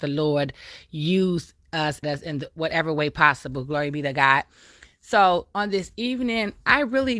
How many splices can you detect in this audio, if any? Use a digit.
1